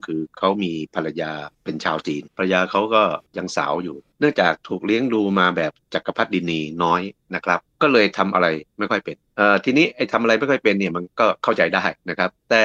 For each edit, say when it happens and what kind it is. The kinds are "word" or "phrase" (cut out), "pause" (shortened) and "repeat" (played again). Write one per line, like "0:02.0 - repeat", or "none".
0:01.5 - pause
0:02.3 - pause